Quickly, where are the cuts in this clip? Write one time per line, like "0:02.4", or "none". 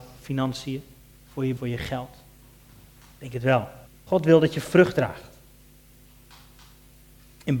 0:01.6
0:03.9